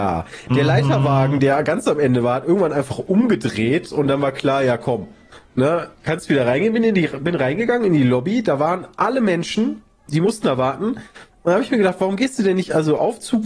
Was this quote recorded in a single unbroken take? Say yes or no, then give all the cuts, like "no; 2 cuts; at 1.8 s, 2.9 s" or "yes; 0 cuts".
no; 1 cut; at 10.1 s